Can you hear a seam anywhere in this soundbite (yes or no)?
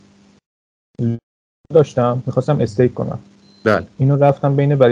no